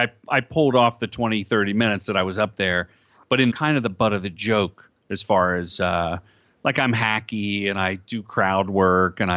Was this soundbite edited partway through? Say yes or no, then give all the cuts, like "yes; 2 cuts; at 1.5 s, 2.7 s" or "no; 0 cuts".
yes; 1 cut; at 3.5 s